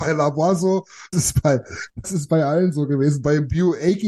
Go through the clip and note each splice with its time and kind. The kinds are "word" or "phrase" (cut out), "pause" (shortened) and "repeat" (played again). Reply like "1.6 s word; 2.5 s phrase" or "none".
1.1 s word; 2.0 s word